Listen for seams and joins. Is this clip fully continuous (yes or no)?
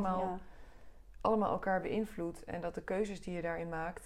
yes